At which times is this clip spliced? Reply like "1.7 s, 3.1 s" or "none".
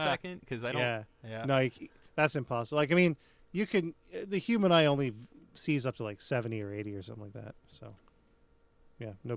none